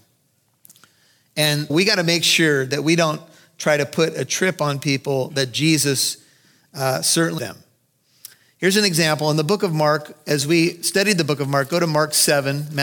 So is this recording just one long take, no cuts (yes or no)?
no